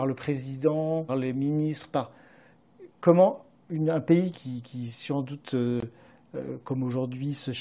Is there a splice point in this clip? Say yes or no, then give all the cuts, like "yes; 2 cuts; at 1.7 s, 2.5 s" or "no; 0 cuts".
yes; 3 cuts; at 1.1 s, 2.9 s, 4.3 s